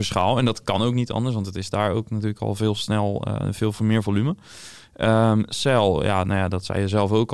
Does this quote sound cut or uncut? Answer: uncut